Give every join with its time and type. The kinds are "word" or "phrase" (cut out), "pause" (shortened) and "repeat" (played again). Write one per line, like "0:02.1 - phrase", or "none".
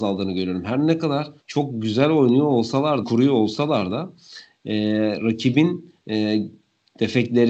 0:01.4 - pause
0:03.0 - phrase
0:06.0 - pause